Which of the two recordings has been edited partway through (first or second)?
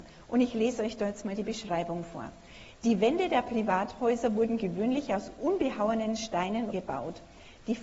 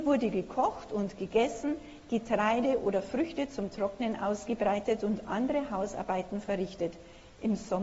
first